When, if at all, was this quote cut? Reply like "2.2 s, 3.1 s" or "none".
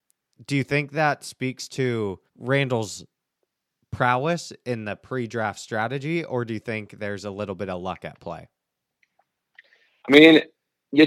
2.3 s